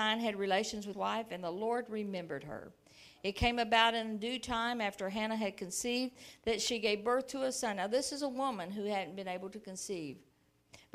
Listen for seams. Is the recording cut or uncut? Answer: cut